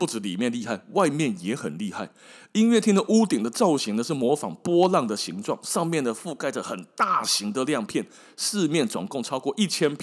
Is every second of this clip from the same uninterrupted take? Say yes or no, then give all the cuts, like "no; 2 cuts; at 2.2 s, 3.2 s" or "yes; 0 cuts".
yes; 0 cuts